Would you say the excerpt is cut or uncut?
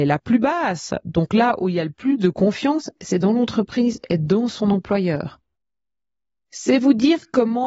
uncut